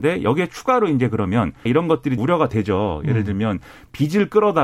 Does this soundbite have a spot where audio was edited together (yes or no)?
yes